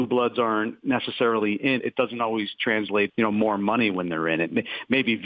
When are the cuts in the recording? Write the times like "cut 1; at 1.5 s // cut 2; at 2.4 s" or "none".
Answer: cut 1; at 1.8 s // cut 2; at 3.1 s